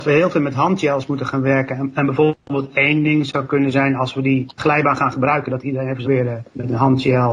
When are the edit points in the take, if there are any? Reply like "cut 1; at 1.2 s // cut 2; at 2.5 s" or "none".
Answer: cut 1; at 4.6 s // cut 2; at 6.1 s

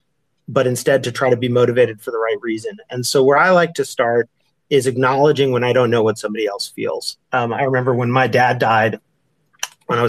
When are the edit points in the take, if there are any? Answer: none

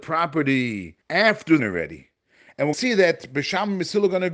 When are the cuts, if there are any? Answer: cut 1; at 1.0 s // cut 2; at 1.6 s // cut 3; at 2.7 s

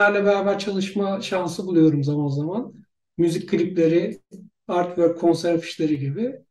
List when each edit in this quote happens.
none

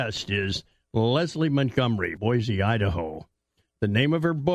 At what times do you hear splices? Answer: cut 1; at 2.2 s

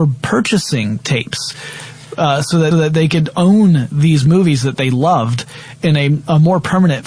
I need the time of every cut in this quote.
cut 1; at 2.7 s

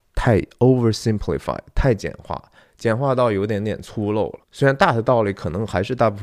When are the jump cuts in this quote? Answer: cut 1; at 4.4 s

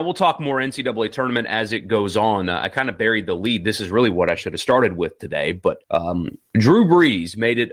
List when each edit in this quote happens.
cut 1; at 5.8 s

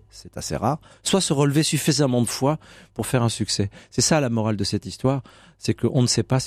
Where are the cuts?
none

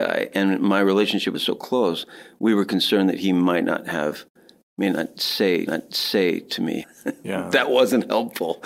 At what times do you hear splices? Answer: cut 1; at 1.3 s // cut 2; at 5.7 s // cut 3; at 6.8 s

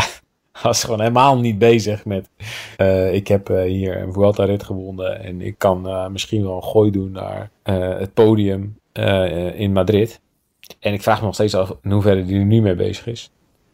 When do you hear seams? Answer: cut 1; at 2.7 s // cut 2; at 7.6 s // cut 3; at 8.8 s // cut 4; at 10.8 s

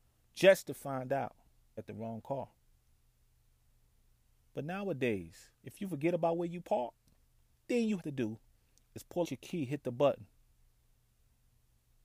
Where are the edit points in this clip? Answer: cut 1; at 1.8 s // cut 2; at 5.5 s // cut 3; at 7.6 s // cut 4; at 8.0 s // cut 5; at 9.2 s

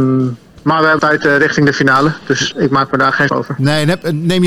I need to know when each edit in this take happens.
cut 1; at 1.0 s // cut 2; at 2.5 s // cut 3; at 3.3 s

